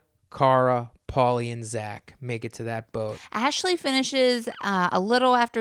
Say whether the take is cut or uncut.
uncut